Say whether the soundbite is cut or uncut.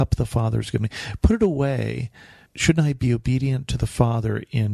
uncut